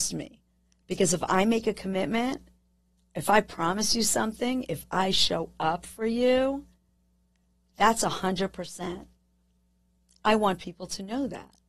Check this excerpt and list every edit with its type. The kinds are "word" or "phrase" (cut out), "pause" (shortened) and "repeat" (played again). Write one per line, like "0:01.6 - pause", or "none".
none